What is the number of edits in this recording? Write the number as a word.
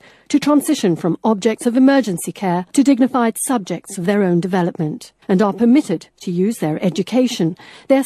two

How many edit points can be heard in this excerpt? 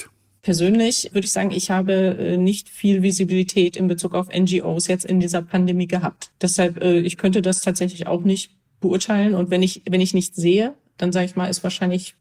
zero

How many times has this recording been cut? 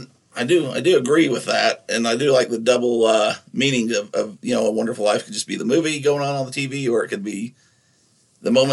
zero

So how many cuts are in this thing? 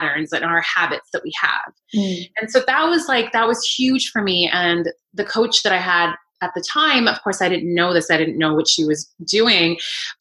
zero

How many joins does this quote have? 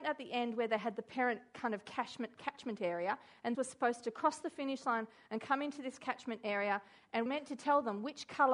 two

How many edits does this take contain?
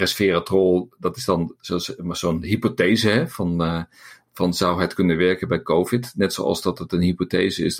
zero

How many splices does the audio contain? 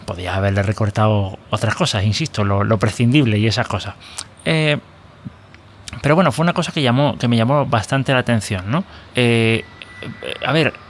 one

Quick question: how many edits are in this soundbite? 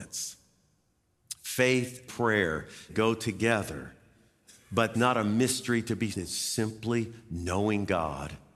four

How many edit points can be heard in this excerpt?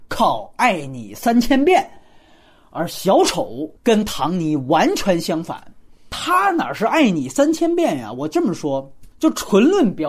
one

